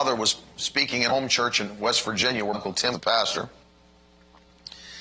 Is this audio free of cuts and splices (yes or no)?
no